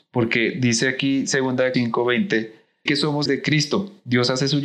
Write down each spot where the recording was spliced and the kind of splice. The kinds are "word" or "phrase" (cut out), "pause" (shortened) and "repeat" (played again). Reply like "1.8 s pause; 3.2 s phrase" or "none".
1.7 s word; 2.9 s word; 3.3 s word